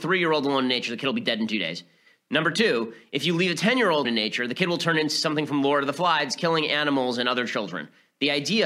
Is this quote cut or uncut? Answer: cut